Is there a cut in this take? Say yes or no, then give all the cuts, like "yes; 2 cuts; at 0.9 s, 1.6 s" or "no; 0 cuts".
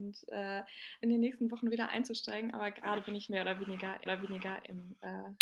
yes; 3 cuts; at 1.0 s, 3.3 s, 4.1 s